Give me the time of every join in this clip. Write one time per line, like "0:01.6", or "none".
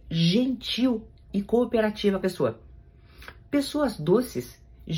0:01.3
0:02.2